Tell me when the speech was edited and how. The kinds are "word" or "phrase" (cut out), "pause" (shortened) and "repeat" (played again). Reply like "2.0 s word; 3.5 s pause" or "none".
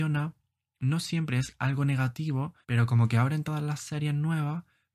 2.6 s pause